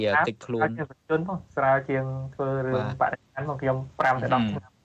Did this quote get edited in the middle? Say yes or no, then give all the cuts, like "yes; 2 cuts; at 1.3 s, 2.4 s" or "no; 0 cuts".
yes; 2 cuts; at 1.0 s, 1.5 s